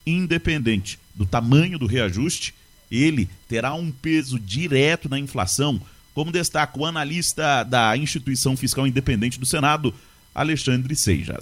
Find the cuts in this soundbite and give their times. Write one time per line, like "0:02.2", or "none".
none

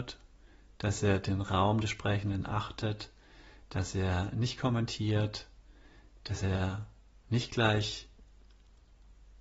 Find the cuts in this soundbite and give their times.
none

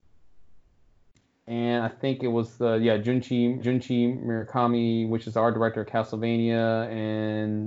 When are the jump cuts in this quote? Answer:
0:03.6

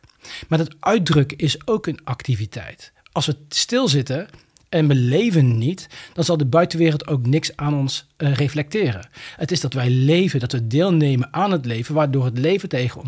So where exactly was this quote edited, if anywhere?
none

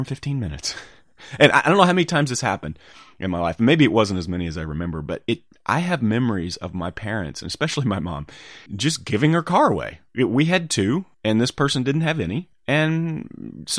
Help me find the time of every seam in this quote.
0:08.7
0:10.1
0:11.1
0:12.5

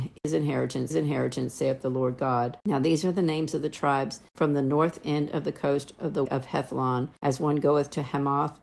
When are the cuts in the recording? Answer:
0:00.9
0:06.3

